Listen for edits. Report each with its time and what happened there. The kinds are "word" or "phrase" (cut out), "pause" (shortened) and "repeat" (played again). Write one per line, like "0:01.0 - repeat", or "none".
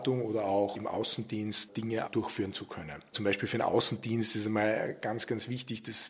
none

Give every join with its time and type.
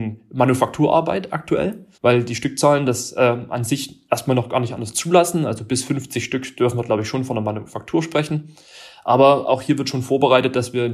0:01.9 - pause

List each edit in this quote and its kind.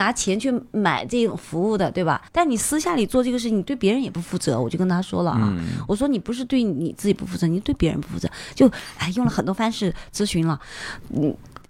0:02.3 - pause

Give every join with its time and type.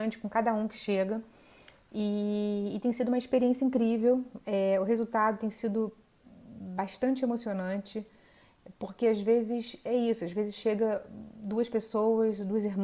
none

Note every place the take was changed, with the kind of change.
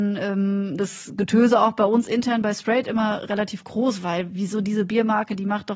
none

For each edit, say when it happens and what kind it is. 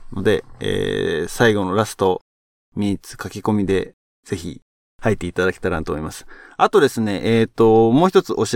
none

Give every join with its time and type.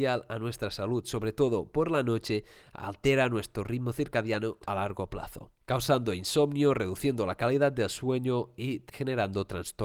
none

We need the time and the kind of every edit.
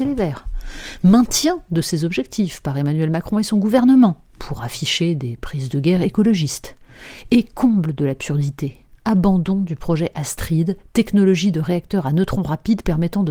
0:04.3 - pause

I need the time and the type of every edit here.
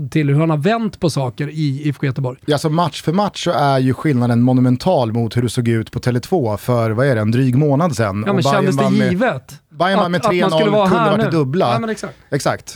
none

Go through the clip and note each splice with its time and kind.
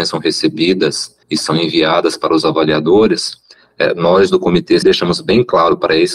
0:01.2 - pause
0:04.8 - word

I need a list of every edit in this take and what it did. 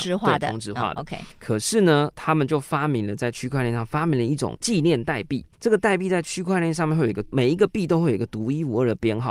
0:01.3 - pause
0:05.5 - pause

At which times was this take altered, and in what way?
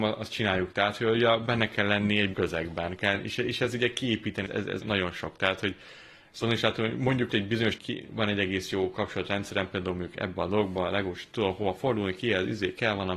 0:02.3 - word
0:03.0 - phrase
0:04.5 - word
0:04.8 - word
0:07.3 - word
0:07.8 - word

